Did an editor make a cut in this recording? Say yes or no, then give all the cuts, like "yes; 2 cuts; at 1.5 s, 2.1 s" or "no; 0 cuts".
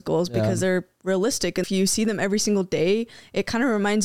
yes; 1 cut; at 1.6 s